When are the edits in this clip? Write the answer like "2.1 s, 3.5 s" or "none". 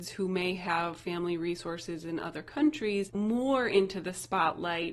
none